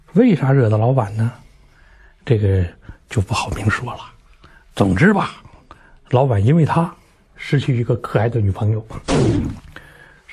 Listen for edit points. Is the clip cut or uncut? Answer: uncut